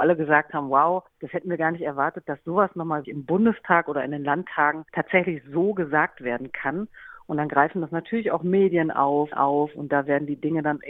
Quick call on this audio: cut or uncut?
cut